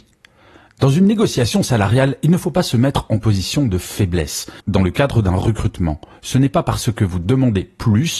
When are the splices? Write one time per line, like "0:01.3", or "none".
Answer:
0:04.6